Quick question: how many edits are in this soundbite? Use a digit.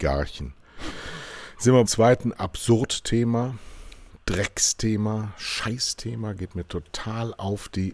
1